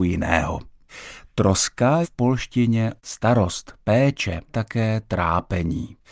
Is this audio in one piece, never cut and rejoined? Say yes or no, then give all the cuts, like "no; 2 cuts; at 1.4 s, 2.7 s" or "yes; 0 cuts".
no; 3 cuts; at 2.0 s, 3.0 s, 4.5 s